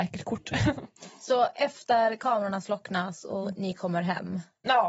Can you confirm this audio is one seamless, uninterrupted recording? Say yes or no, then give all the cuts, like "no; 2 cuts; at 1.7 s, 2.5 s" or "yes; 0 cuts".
yes; 0 cuts